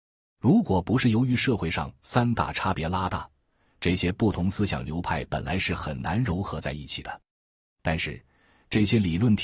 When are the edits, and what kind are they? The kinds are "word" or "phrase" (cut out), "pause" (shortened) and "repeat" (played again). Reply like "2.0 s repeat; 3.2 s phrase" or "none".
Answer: none